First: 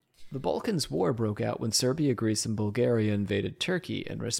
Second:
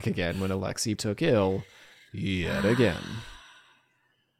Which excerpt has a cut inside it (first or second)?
second